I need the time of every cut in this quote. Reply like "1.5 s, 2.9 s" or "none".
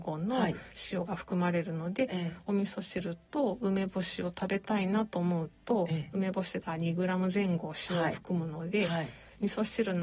none